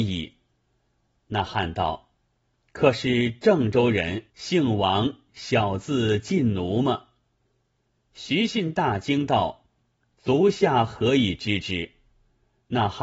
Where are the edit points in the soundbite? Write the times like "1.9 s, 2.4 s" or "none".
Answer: 4.3 s